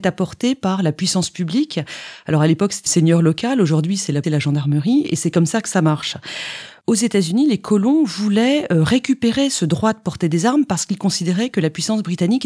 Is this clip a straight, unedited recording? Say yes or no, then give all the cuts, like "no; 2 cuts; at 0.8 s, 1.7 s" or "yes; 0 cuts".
no; 2 cuts; at 2.9 s, 4.2 s